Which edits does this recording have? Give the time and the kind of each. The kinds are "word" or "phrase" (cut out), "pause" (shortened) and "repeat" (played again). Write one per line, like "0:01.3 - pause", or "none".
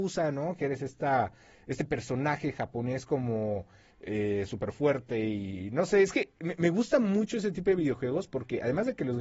none